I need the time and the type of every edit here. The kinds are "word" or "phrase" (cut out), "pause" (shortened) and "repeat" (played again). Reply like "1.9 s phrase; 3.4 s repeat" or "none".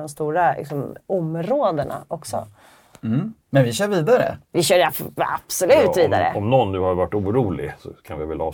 1.0 s pause; 3.4 s pause; 4.4 s pause

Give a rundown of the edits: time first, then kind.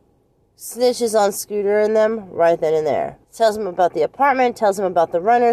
3.2 s pause

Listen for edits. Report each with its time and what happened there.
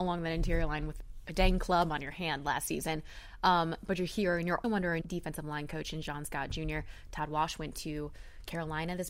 4.6 s word; 5.0 s word

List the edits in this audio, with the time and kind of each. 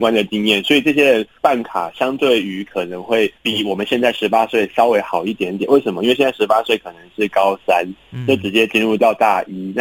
1.4 s pause; 3.4 s pause

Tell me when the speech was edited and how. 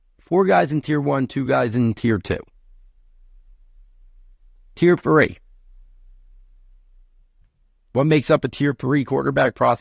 none

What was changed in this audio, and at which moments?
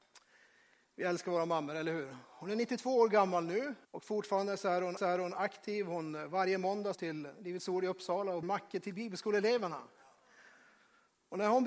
3.8 s pause; 5.0 s repeat; 6.9 s phrase; 8.4 s word

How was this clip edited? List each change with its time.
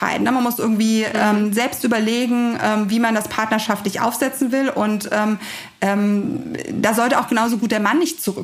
none

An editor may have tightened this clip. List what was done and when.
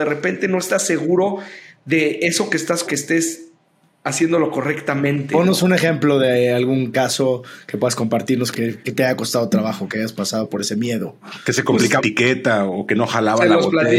2.8 s word; 8.5 s word; 12.0 s word

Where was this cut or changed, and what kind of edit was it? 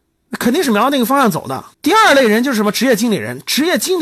1.7 s pause

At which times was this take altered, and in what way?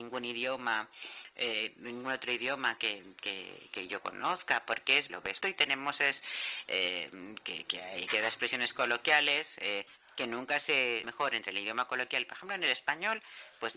2.8 s word; 5.1 s phrase; 5.4 s phrase; 10.0 s pause; 11.0 s phrase

